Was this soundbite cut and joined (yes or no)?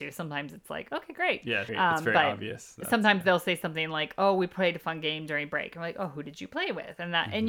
yes